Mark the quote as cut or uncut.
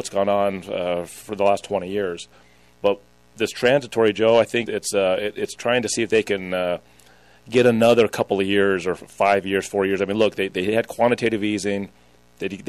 cut